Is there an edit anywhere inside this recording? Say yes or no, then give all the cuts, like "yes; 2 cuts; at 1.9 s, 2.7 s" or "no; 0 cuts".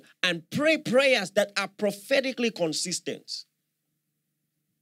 no; 0 cuts